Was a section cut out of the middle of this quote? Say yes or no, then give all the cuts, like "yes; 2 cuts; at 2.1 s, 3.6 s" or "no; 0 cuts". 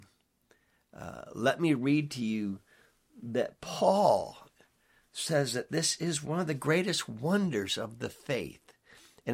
no; 0 cuts